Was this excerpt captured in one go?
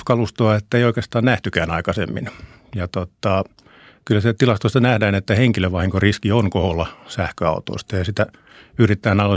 yes; 0 cuts

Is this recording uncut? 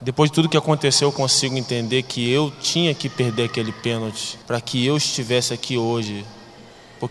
no; 1 cut; at 4.4 s

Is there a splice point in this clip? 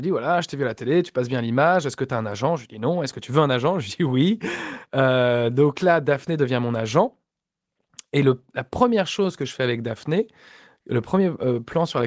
no; 0 cuts

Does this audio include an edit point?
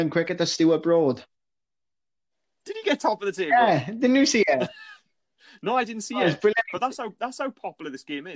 no; 0 cuts

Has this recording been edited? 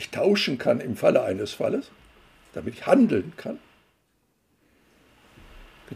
no; 0 cuts

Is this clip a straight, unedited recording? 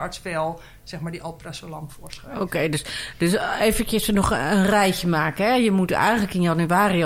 yes; 0 cuts

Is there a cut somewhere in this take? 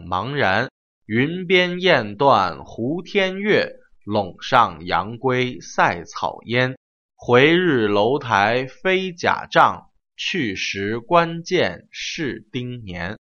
no; 0 cuts

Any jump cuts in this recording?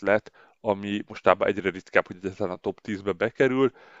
no; 0 cuts

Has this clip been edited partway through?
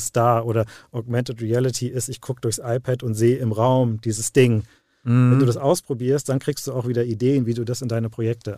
no; 0 cuts

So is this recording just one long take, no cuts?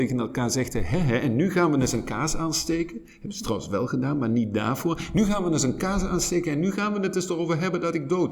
yes; 0 cuts

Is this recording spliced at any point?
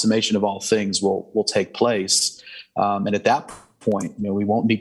no; 0 cuts

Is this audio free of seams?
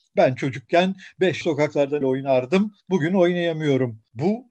no; 3 cuts; at 1.4 s, 2.0 s, 2.8 s

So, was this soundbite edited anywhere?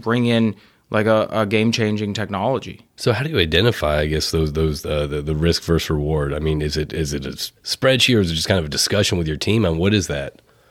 yes; 1 cut; at 7.6 s

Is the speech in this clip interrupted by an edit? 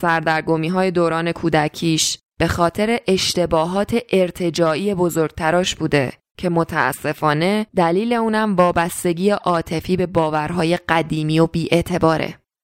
no; 0 cuts

